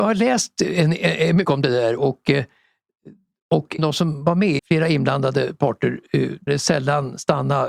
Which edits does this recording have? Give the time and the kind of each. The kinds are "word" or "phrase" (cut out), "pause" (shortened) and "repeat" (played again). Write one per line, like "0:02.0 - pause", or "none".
0:01.4 - word
0:03.8 - word
0:04.6 - word
0:06.5 - word